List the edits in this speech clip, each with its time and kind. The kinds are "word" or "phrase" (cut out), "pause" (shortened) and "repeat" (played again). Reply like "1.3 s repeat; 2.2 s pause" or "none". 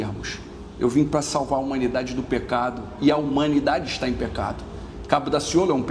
none